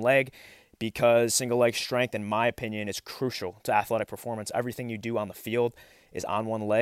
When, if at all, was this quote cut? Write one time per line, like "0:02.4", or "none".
none